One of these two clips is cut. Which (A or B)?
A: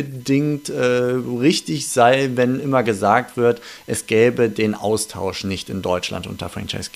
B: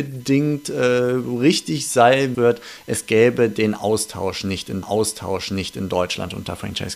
B